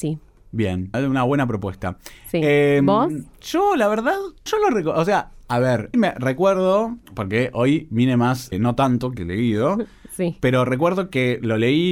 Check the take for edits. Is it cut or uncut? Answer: cut